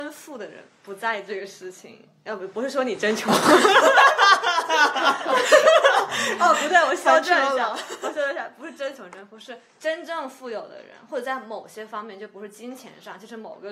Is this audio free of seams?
yes; 0 cuts

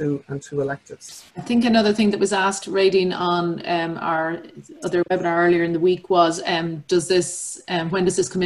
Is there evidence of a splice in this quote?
yes; 1 cut; at 1.3 s

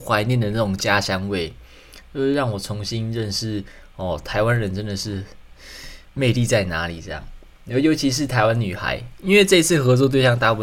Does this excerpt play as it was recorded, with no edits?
yes; 0 cuts

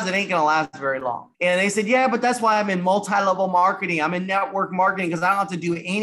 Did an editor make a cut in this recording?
yes; 1 cut; at 1.3 s

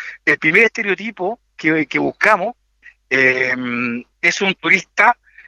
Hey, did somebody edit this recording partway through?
no; 0 cuts

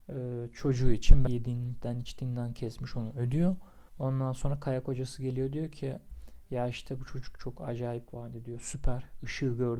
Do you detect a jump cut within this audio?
yes; 3 cuts; at 1.3 s, 3.9 s, 8.1 s

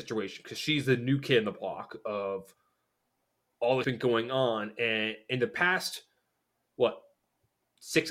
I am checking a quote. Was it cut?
yes; 1 cut; at 3.8 s

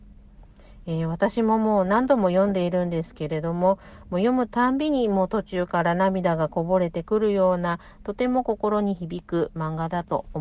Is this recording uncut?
yes; 0 cuts

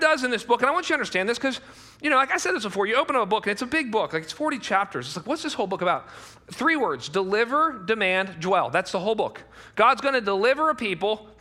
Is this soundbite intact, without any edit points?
yes; 0 cuts

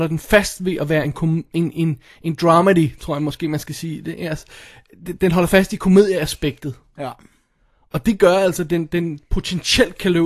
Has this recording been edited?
no; 0 cuts

